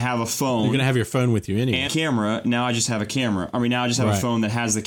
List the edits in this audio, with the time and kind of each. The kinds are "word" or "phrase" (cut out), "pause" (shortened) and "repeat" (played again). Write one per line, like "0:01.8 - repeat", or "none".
0:01.9 - word